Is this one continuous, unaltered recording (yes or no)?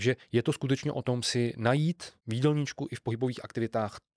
no